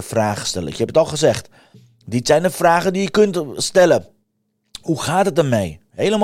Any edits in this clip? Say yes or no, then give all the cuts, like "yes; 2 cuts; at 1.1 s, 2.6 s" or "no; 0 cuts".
no; 0 cuts